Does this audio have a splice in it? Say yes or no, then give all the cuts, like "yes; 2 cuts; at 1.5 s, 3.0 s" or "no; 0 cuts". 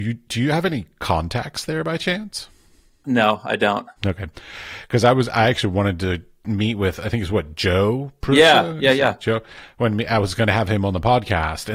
yes; 1 cut; at 4.0 s